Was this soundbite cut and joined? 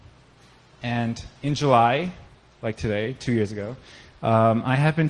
no; 0 cuts

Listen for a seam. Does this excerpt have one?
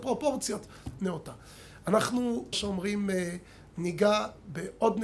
yes; 2 cuts; at 1.0 s, 2.5 s

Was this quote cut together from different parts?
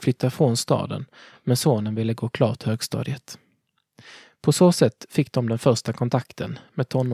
no; 0 cuts

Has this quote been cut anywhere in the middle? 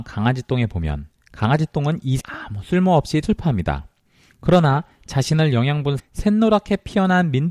yes; 3 cuts; at 2.2 s, 3.2 s, 6.0 s

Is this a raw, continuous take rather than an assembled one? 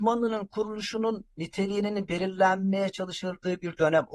yes; 0 cuts

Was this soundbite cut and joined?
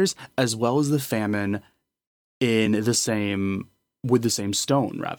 no; 0 cuts

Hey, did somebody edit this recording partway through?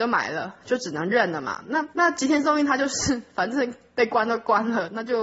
yes; 1 cut; at 1.9 s

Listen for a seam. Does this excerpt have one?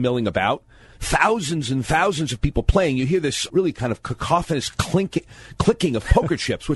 yes; 1 cut; at 3.5 s

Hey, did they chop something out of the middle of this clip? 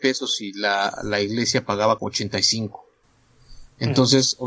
yes; 1 cut; at 2.0 s

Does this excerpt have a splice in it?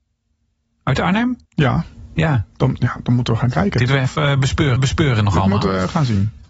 yes; 5 cuts; at 1.4 s, 2.5 s, 3.4 s, 3.9 s, 4.8 s

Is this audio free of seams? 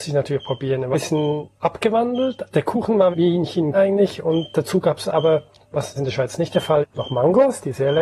no; 5 cuts; at 0.9 s, 3.1 s, 3.7 s, 6.0 s, 6.8 s

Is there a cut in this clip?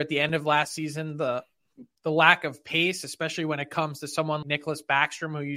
yes; 1 cut; at 4.4 s

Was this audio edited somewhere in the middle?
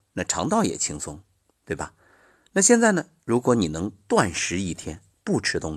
no; 0 cuts

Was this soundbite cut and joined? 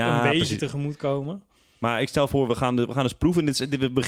no; 0 cuts

